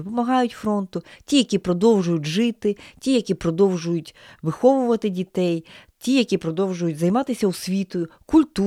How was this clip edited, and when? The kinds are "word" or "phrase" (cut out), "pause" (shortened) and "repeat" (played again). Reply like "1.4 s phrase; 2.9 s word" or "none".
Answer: none